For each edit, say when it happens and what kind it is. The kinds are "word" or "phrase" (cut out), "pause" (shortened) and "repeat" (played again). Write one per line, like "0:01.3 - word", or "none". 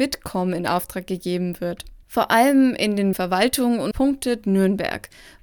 0:02.0 - pause
0:03.1 - word
0:03.9 - word